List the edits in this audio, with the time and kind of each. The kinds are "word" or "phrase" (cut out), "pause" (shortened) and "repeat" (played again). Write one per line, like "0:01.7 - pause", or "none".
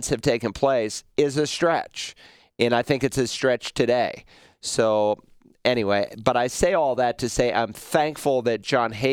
none